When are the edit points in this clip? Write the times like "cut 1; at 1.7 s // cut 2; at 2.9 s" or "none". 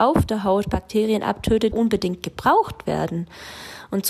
cut 1; at 1.7 s

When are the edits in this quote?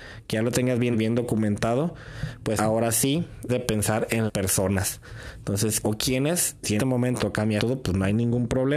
cut 1; at 0.9 s // cut 2; at 2.6 s // cut 3; at 3.5 s // cut 4; at 4.3 s // cut 5; at 5.8 s // cut 6; at 6.8 s // cut 7; at 7.2 s // cut 8; at 7.6 s

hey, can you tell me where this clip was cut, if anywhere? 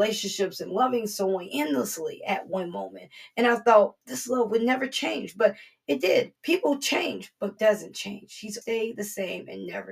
cut 1; at 6.4 s // cut 2; at 7.6 s // cut 3; at 8.6 s

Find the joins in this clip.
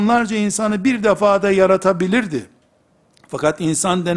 none

